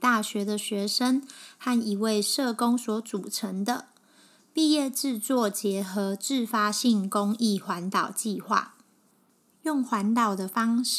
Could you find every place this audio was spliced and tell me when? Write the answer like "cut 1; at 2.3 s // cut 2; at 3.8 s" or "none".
none